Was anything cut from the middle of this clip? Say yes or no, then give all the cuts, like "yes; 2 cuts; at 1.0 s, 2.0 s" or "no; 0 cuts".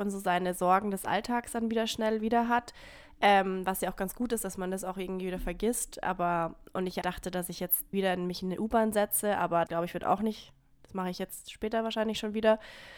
yes; 3 cuts; at 7.0 s, 7.9 s, 9.7 s